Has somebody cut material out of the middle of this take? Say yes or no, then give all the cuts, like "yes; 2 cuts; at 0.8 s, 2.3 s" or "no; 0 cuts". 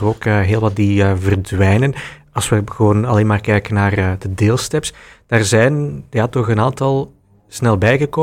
no; 0 cuts